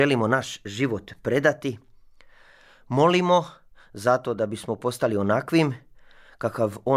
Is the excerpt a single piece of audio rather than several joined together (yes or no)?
yes